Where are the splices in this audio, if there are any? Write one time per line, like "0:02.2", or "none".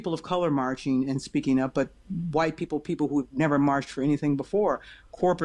none